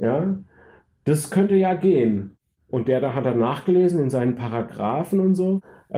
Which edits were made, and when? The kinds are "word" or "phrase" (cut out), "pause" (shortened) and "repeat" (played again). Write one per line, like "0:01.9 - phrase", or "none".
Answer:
none